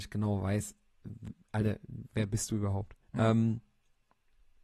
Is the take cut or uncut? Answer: cut